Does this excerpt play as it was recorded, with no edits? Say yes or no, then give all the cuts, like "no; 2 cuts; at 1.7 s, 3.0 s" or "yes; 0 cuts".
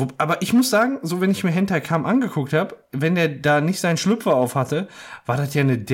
yes; 0 cuts